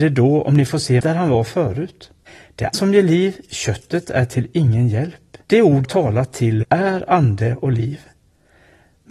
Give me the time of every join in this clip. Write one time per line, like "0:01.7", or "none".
0:01.0
0:02.3
0:02.7
0:05.4
0:05.8
0:06.6